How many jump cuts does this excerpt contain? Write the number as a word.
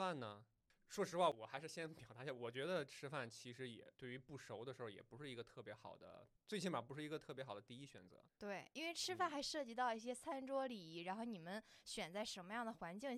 three